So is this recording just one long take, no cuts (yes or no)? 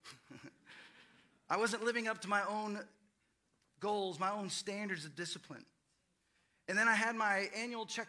yes